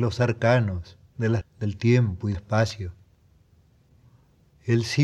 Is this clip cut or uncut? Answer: cut